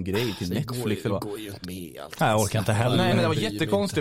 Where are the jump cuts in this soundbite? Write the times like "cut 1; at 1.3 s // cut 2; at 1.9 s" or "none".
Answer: cut 1; at 1.1 s // cut 2; at 1.6 s // cut 3; at 3.1 s